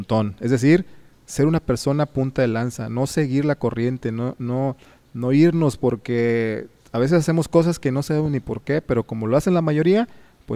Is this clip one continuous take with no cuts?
yes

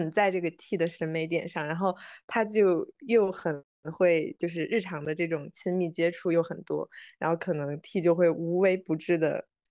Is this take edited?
no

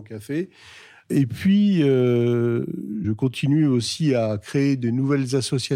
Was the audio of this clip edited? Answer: yes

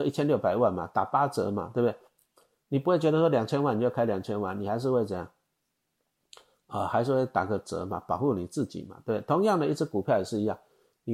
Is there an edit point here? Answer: no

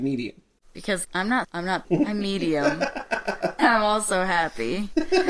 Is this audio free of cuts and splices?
no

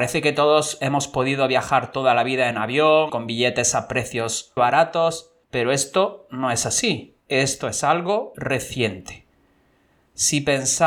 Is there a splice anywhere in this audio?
yes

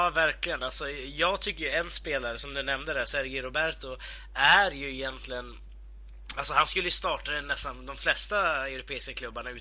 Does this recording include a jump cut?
no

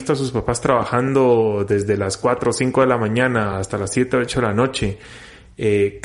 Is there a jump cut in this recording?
no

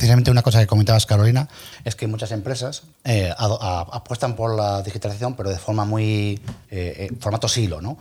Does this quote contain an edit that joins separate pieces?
yes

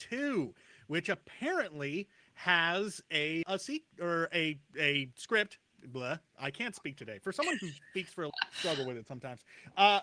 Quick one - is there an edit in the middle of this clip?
yes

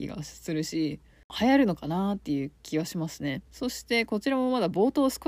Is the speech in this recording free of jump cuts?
no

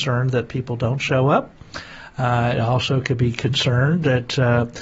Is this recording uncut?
yes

